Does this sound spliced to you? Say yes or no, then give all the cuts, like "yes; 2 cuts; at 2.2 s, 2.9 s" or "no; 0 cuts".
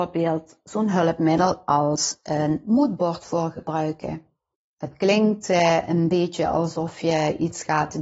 yes; 1 cut; at 4.5 s